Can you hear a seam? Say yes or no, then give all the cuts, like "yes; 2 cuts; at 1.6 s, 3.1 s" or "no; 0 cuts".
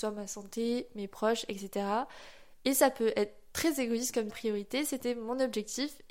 yes; 1 cut; at 4.3 s